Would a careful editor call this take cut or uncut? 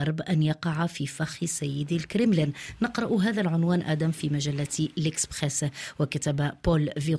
uncut